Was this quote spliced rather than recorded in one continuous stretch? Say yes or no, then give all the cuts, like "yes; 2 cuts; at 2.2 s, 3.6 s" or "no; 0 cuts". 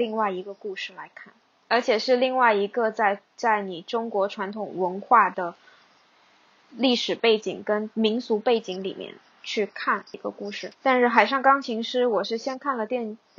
no; 0 cuts